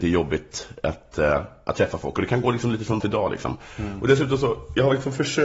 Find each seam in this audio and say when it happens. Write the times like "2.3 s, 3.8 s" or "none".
3.0 s